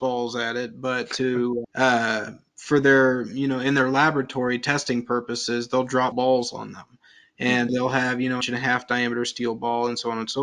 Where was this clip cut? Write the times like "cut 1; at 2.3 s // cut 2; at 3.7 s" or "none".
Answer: cut 1; at 1.6 s // cut 2; at 6.1 s // cut 3; at 7.7 s // cut 4; at 8.4 s